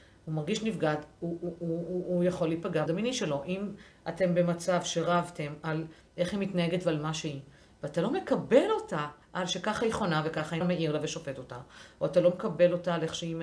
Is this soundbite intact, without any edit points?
no; 3 cuts; at 2.9 s, 9.2 s, 10.6 s

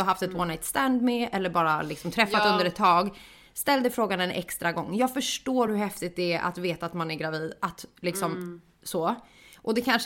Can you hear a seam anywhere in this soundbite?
no; 0 cuts

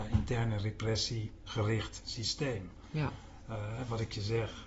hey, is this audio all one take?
yes; 0 cuts

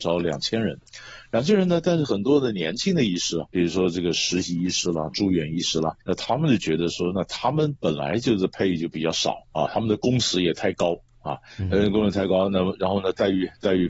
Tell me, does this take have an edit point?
yes; 3 cuts; at 3.5 s, 6.0 s, 9.4 s

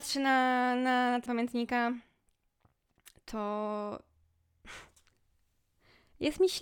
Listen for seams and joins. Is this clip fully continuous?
no; 1 cut; at 1.3 s

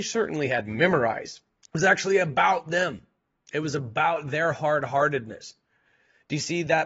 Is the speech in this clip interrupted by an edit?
yes; 2 cuts; at 1.6 s, 3.2 s

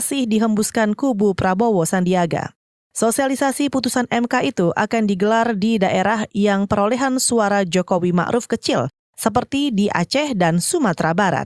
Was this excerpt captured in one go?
yes; 0 cuts

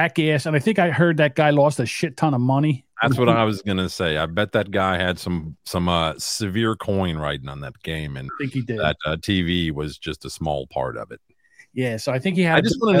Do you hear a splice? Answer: yes; 1 cut; at 8.3 s

